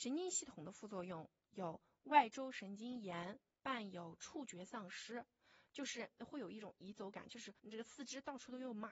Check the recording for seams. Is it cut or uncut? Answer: cut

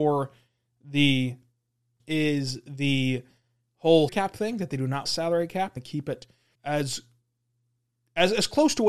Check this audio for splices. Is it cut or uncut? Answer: cut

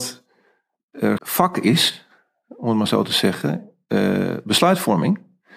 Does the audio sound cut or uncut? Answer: cut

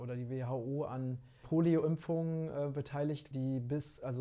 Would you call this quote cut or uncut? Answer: cut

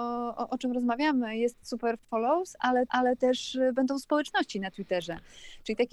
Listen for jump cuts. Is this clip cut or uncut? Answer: cut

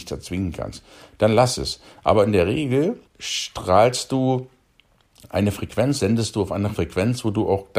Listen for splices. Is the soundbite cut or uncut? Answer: cut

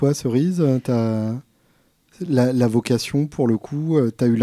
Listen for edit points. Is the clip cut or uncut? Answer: uncut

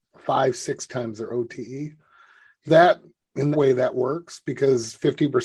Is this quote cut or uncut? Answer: cut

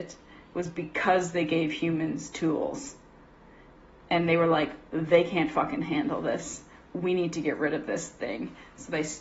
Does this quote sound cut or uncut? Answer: uncut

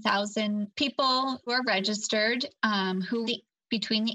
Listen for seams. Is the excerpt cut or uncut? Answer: cut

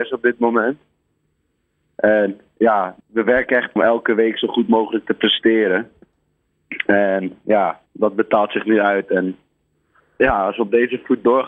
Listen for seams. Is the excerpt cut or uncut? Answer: cut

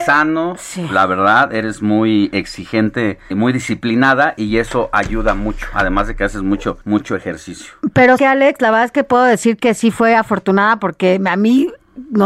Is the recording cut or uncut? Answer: cut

